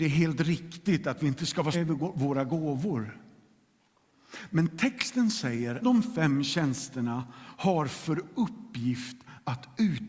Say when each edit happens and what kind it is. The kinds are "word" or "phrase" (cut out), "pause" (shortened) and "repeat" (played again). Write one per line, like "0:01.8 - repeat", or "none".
0:01.7 - word
0:05.8 - phrase